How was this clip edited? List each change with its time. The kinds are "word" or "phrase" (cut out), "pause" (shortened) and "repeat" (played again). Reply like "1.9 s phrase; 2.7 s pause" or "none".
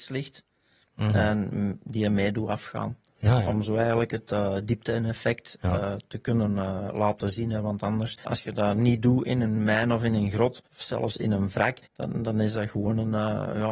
8.2 s word; 10.7 s pause; 11.9 s pause